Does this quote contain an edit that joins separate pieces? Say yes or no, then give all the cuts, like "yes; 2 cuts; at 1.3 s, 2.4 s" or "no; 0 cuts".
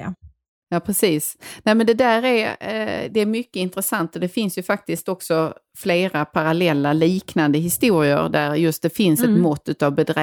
no; 0 cuts